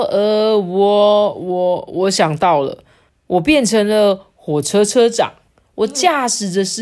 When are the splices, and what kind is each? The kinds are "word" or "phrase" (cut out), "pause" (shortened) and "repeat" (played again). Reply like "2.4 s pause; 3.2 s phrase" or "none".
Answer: 3.1 s pause; 5.5 s pause